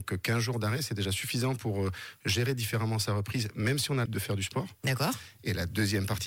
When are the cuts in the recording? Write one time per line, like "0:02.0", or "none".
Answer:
0:04.1